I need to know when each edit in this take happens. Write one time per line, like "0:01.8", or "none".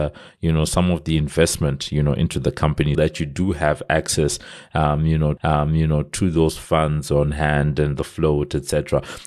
0:02.9
0:05.4